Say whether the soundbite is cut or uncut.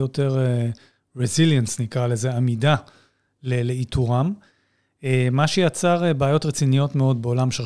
uncut